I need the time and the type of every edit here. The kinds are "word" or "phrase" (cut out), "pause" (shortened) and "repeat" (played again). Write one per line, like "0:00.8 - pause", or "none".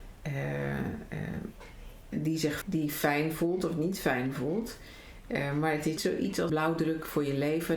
0:02.1 - word
0:02.6 - word
0:06.0 - word
0:06.5 - word

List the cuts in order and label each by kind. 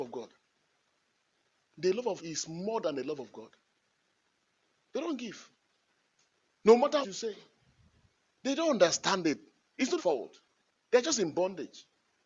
0:02.2 - word
0:07.0 - word
0:10.0 - word

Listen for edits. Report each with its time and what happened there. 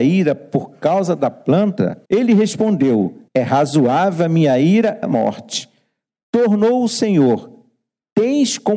0:02.0 - pause
0:03.3 - pause
0:05.0 - word

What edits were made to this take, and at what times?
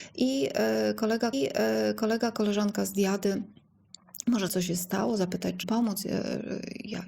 0:01.3 - repeat
0:04.5 - word
0:05.6 - word

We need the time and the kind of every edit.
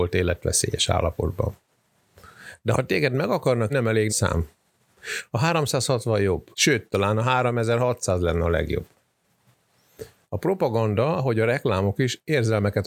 0:03.7 - phrase
0:04.1 - word
0:06.5 - pause

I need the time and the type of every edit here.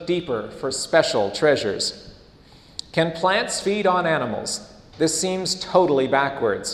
none

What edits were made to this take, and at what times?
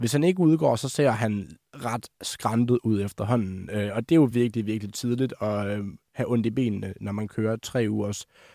none

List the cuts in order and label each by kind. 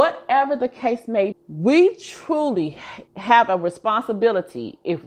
0:01.3 - word
0:03.1 - pause

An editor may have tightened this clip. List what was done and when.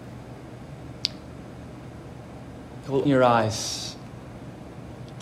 0:03.1 - word

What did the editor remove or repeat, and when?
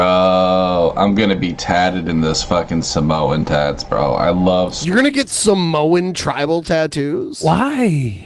none

